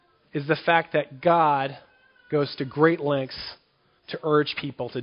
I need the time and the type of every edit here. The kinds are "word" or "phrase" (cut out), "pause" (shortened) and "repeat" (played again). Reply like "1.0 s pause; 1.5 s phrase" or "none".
none